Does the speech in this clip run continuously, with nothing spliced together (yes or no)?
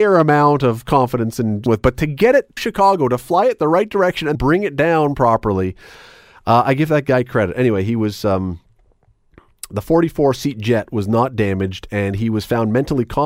no